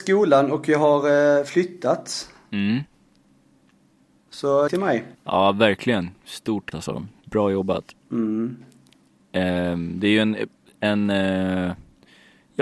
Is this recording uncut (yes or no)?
no